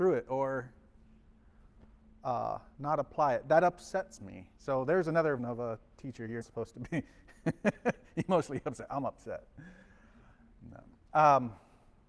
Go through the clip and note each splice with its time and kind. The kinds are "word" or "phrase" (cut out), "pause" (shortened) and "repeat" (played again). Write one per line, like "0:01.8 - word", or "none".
0:02.7 - pause
0:04.6 - pause
0:05.4 - word
0:06.4 - word